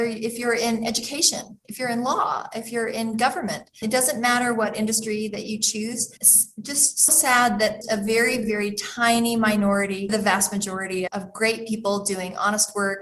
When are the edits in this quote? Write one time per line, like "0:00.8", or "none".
0:03.8
0:06.2
0:07.1
0:07.8
0:08.4
0:10.1
0:11.1